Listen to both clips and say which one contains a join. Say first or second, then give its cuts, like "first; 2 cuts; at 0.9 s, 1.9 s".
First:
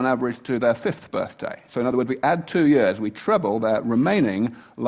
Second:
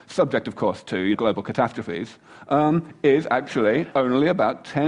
second; 2 cuts; at 1.1 s, 3.9 s